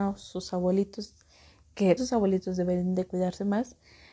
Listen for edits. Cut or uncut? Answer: cut